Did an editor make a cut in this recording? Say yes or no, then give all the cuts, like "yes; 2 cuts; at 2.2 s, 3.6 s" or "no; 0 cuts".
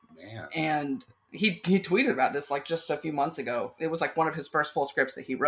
no; 0 cuts